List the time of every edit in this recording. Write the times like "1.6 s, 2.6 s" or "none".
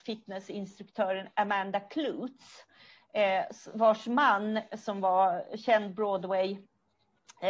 none